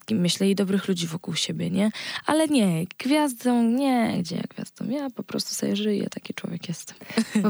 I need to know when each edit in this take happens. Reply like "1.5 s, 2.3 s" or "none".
none